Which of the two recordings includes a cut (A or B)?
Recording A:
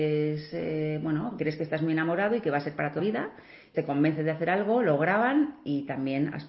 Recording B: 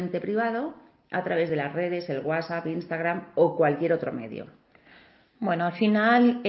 A